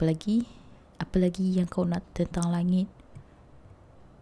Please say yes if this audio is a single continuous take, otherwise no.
no